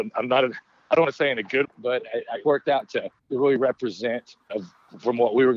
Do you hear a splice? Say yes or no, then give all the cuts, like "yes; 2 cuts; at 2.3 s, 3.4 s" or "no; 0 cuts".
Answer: yes; 4 cuts; at 1.6 s, 2.4 s, 3.2 s, 4.5 s